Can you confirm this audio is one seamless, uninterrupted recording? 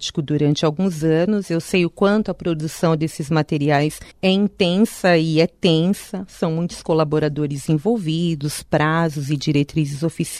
no; 1 cut; at 4.1 s

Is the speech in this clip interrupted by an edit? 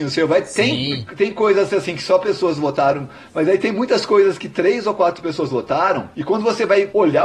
no; 0 cuts

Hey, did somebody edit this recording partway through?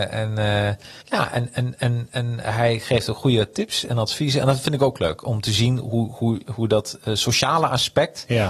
yes; 1 cut; at 1.0 s

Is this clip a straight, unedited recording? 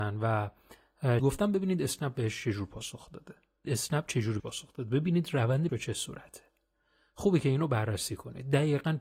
no; 4 cuts; at 1.2 s, 3.6 s, 4.4 s, 5.7 s

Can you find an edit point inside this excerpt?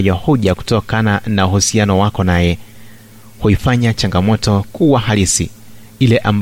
no; 0 cuts

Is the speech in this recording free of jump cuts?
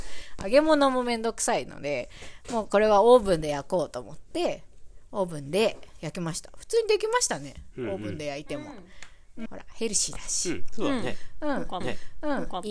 no; 2 cuts; at 9.5 s, 11.8 s

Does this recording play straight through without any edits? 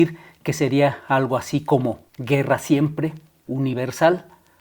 no; 2 cuts; at 2.1 s, 3.5 s

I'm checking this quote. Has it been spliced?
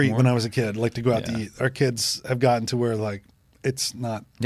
no; 0 cuts

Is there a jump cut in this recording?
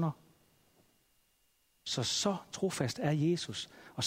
no; 0 cuts

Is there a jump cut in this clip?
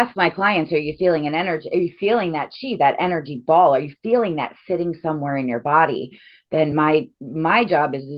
no; 0 cuts

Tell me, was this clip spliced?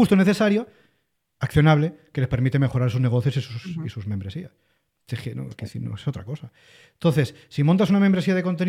no; 0 cuts

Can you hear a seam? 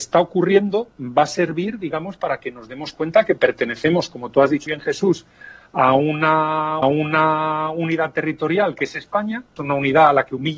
yes; 3 cuts; at 4.7 s, 6.8 s, 9.6 s

